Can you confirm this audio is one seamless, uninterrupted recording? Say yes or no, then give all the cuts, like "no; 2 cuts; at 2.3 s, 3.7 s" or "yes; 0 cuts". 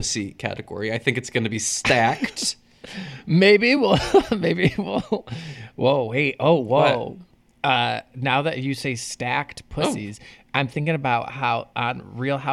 yes; 0 cuts